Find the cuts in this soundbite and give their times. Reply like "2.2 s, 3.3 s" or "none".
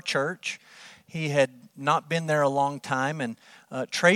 none